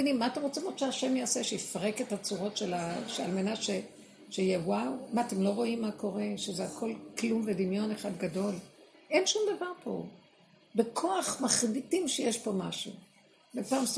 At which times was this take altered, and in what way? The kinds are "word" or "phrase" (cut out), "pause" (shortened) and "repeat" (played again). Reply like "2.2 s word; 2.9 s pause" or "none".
none

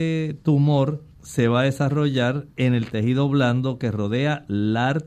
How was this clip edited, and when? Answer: 1.1 s pause; 2.5 s pause

